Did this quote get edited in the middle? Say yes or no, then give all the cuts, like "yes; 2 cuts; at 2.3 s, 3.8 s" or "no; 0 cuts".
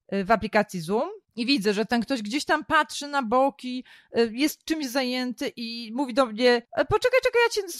yes; 2 cuts; at 1.2 s, 6.6 s